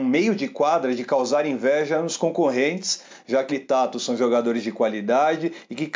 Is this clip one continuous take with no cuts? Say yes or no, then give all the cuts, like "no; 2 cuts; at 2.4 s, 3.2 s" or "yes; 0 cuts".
no; 1 cut; at 3.5 s